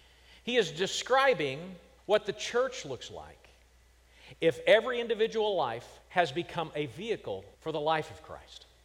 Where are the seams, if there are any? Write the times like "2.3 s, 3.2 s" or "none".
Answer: 2.0 s, 6.0 s, 7.5 s